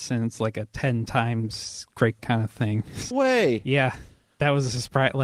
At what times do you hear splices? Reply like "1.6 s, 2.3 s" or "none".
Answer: 2.2 s, 3.1 s